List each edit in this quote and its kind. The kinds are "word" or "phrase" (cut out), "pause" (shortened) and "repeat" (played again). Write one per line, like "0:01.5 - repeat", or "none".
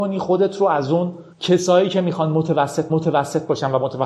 0:01.3 - pause
0:02.9 - repeat